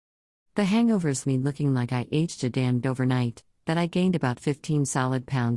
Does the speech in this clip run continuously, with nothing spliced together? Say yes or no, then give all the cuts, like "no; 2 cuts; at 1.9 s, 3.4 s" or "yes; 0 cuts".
no; 2 cuts; at 1.2 s, 2.8 s